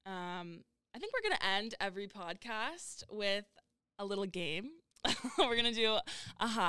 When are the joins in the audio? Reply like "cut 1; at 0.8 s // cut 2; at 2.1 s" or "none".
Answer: none